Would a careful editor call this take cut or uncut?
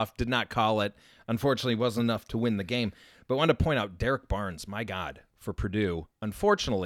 uncut